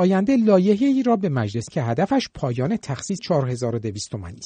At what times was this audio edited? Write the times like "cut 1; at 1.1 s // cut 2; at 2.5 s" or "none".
cut 1; at 1.7 s // cut 2; at 3.2 s